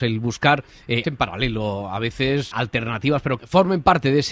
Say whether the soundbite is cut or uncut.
cut